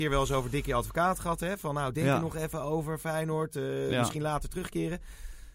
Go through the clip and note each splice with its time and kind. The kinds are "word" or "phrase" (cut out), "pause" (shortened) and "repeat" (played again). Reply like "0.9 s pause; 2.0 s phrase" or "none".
none